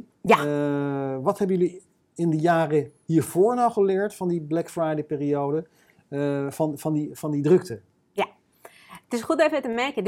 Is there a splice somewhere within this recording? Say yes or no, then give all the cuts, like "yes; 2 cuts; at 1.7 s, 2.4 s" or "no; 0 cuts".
no; 0 cuts